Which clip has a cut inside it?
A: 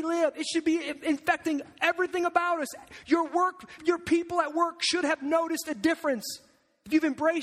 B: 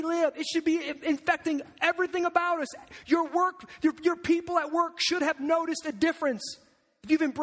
A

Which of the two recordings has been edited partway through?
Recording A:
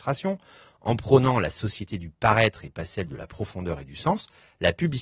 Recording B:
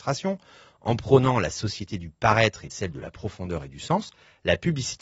B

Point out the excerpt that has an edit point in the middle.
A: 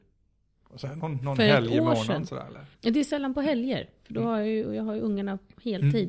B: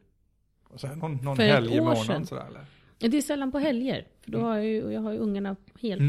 A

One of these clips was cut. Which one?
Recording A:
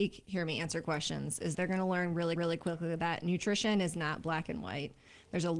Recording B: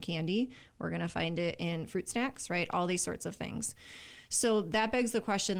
A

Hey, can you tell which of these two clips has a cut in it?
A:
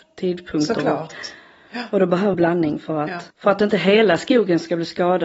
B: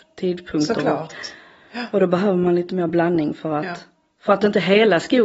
A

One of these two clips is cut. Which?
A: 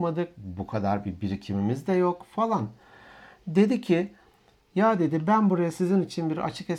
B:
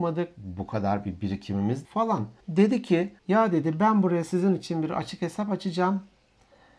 B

